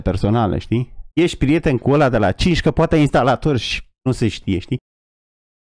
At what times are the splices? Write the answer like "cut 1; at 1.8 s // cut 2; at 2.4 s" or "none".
cut 1; at 1.1 s

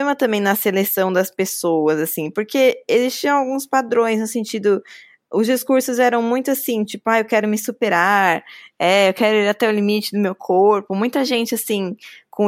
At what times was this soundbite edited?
none

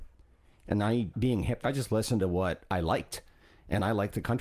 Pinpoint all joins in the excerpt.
cut 1; at 1.1 s // cut 2; at 1.6 s

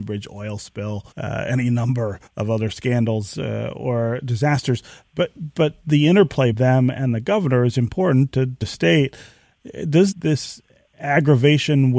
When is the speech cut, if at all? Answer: cut 1; at 1.1 s // cut 2; at 2.3 s // cut 3; at 6.5 s // cut 4; at 8.6 s // cut 5; at 10.1 s

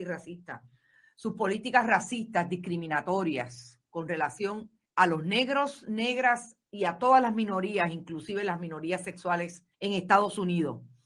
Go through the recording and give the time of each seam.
cut 1; at 4.9 s // cut 2; at 9.7 s

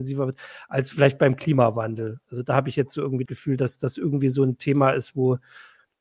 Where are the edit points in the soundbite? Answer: cut 1; at 3.3 s

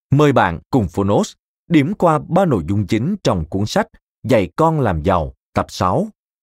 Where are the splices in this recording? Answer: none

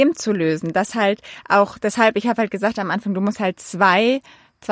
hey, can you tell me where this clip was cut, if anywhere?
none

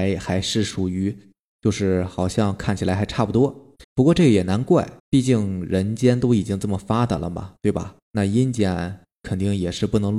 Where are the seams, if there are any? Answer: cut 1; at 3.8 s // cut 2; at 5.0 s // cut 3; at 8.0 s

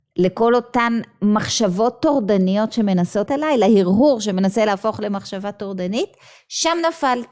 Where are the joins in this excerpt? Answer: cut 1; at 3.3 s

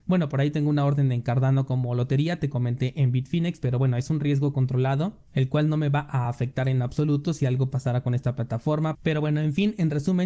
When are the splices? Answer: none

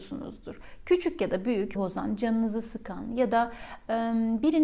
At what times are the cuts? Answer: cut 1; at 1.8 s

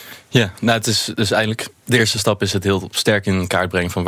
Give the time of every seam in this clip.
none

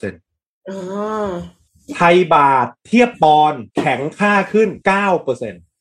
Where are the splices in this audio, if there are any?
cut 1; at 1.7 s // cut 2; at 3.7 s // cut 3; at 4.8 s

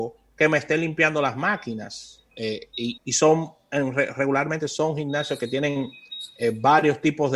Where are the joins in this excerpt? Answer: cut 1; at 2.3 s // cut 2; at 3.0 s

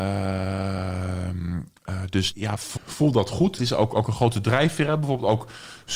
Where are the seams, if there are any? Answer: cut 1; at 2.3 s // cut 2; at 2.8 s // cut 3; at 3.6 s

